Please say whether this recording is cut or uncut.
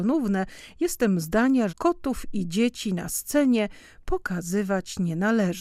cut